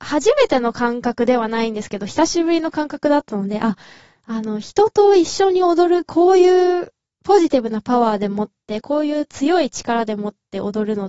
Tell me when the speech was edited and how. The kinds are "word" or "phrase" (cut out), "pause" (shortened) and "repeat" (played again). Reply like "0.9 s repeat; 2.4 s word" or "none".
none